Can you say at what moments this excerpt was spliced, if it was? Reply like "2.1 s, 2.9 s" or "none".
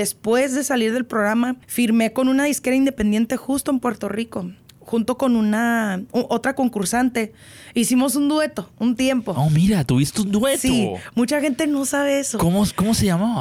1.6 s